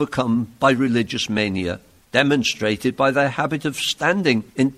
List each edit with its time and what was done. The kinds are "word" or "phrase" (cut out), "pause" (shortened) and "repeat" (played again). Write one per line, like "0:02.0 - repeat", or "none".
none